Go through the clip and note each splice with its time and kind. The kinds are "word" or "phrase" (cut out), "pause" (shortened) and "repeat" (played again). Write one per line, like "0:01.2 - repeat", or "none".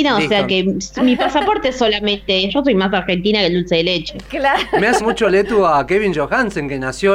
0:02.5 - phrase
0:05.0 - word